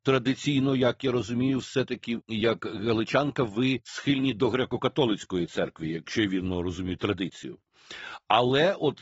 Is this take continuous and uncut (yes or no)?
yes